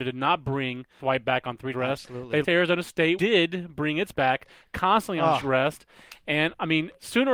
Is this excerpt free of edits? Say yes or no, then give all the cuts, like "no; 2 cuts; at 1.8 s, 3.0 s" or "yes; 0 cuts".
no; 6 cuts; at 1.0 s, 1.7 s, 2.4 s, 3.2 s, 4.1 s, 5.4 s